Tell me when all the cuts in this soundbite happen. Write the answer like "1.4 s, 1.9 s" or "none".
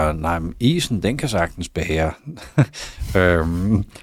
none